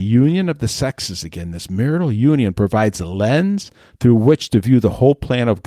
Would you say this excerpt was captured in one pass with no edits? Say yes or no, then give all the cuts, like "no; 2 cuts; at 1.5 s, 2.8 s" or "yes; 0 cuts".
yes; 0 cuts